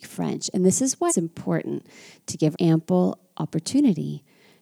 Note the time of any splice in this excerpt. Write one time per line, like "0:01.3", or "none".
0:01.1
0:02.5